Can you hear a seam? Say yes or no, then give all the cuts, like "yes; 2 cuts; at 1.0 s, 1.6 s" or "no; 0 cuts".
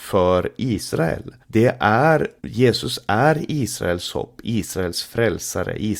yes; 2 cuts; at 1.4 s, 2.4 s